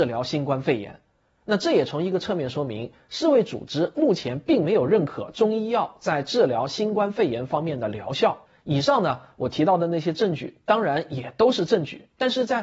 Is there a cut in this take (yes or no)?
yes